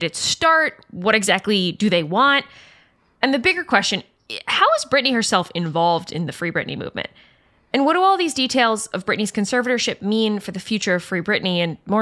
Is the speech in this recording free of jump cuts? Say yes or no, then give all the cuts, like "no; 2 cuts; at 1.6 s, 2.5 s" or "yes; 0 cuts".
yes; 0 cuts